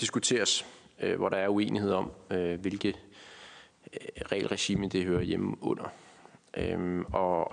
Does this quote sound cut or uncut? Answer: uncut